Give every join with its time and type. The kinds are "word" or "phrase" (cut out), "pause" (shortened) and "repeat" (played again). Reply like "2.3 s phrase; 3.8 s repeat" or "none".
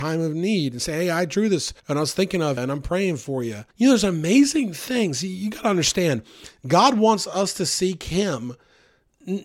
1.8 s pause; 2.6 s word; 3.7 s pause